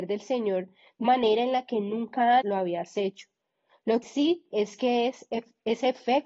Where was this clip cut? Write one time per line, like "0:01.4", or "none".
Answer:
0:01.0
0:02.4
0:04.0
0:04.5